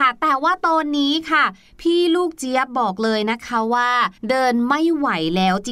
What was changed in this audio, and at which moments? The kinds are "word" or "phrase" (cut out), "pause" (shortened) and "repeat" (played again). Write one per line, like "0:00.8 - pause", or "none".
0:04.2 - pause